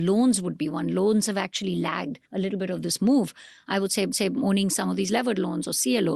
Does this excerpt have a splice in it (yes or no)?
yes